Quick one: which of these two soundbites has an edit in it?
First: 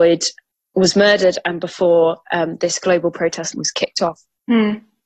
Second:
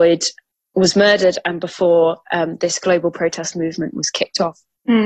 first; 1 cut; at 3.5 s

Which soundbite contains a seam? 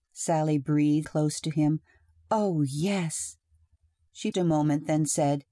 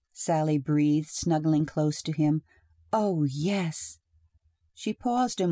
first; 2 cuts; at 1.0 s, 4.3 s

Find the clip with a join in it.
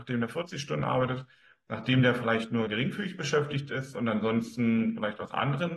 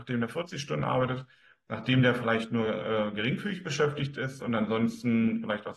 first; 1 cut; at 2.7 s

